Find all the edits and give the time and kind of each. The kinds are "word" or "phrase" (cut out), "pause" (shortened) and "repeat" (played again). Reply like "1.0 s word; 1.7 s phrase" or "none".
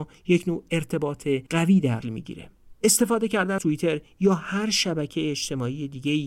1.5 s pause; 2.0 s phrase; 3.6 s word